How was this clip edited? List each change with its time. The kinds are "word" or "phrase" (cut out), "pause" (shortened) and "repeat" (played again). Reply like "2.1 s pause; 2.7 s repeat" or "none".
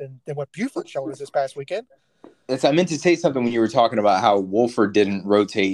none